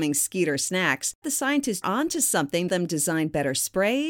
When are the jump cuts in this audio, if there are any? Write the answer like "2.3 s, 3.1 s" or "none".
1.2 s, 1.8 s, 2.7 s

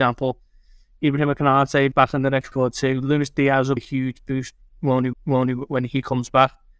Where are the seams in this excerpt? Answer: 1.9 s, 2.5 s, 3.8 s, 5.1 s

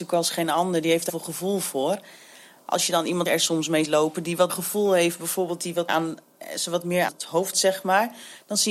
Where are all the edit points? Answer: 1.1 s, 3.3 s, 3.8 s, 4.5 s, 5.9 s, 7.1 s, 7.5 s

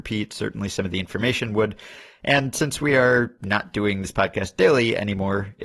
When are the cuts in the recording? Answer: none

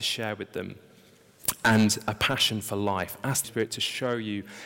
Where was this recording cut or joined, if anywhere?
3.4 s

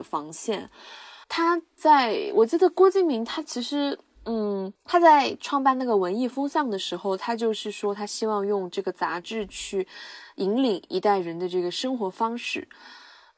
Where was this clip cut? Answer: 1.2 s, 4.8 s

